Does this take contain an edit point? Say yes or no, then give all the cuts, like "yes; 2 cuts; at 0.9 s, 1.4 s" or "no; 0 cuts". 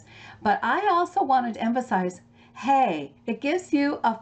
yes; 2 cuts; at 1.5 s, 3.2 s